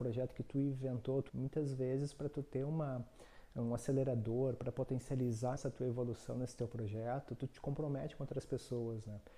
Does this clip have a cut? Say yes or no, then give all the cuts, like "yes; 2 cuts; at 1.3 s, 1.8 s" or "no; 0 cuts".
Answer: yes; 2 cuts; at 1.3 s, 5.6 s